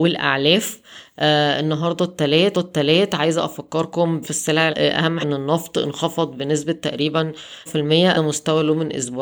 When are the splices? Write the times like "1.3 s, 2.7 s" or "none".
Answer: 2.5 s, 4.2 s, 4.7 s, 5.2 s, 7.7 s, 8.1 s